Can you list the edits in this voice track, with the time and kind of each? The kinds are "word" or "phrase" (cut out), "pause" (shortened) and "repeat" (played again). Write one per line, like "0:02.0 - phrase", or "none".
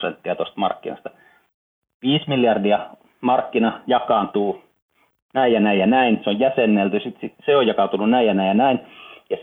none